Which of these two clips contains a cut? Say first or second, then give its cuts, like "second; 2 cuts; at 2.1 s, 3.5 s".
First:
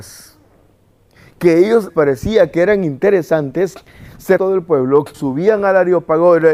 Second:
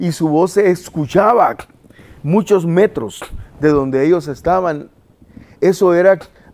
first; 3 cuts; at 1.9 s, 4.4 s, 5.1 s